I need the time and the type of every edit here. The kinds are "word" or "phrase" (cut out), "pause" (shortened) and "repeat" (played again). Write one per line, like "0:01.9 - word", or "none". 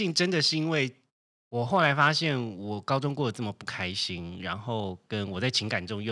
0:01.2 - pause